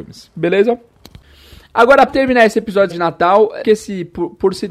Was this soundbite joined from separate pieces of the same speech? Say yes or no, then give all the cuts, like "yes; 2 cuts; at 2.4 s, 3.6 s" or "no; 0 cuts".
yes; 3 cuts; at 2.1 s, 2.9 s, 3.6 s